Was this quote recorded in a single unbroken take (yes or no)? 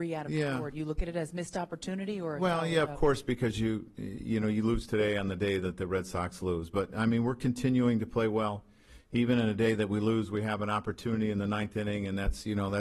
yes